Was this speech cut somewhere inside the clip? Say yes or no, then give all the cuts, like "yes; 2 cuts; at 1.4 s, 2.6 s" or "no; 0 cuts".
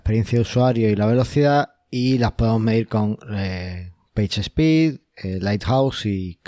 no; 0 cuts